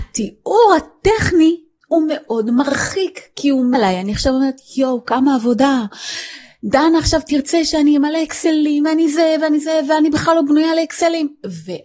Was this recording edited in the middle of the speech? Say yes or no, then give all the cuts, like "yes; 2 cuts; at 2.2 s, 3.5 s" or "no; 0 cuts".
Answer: yes; 1 cut; at 3.7 s